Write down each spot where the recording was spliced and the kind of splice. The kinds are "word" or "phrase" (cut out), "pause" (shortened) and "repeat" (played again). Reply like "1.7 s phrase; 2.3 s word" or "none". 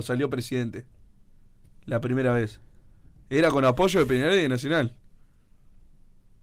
none